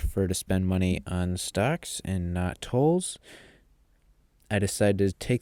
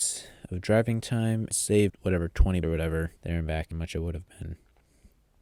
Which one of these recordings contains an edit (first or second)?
second